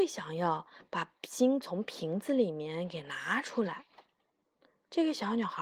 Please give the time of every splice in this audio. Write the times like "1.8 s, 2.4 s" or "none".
4.3 s